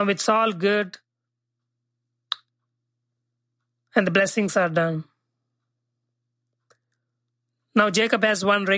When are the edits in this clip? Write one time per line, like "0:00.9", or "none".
none